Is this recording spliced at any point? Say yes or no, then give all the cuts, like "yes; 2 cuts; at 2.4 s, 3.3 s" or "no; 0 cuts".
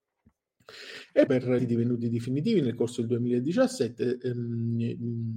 yes; 2 cuts; at 1.3 s, 1.6 s